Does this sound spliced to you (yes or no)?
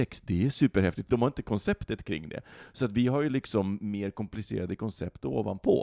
yes